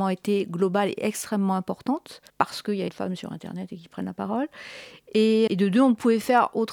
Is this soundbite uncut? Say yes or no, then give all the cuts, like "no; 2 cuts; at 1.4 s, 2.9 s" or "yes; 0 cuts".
no; 3 cuts; at 2.3 s, 2.9 s, 5.5 s